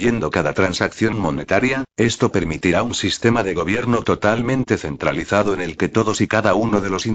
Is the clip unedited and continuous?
yes; 0 cuts

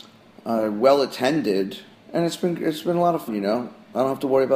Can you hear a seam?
yes; 2 cuts; at 1.9 s, 3.3 s

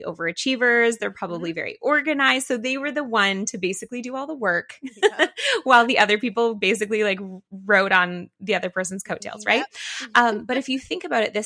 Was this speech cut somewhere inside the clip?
no; 0 cuts

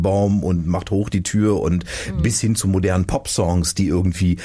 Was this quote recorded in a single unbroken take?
yes; 0 cuts

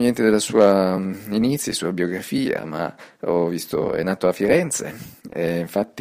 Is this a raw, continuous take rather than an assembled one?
yes; 0 cuts

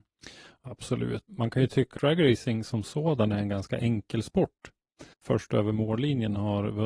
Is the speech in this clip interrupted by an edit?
yes; 3 cuts; at 1.3 s, 2.0 s, 5.1 s

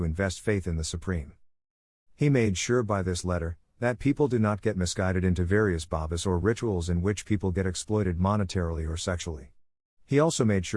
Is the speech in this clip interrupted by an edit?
no; 0 cuts

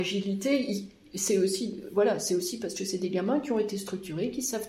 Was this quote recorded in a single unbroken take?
yes; 0 cuts

